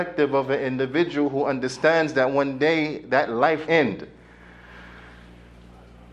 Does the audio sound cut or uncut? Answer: cut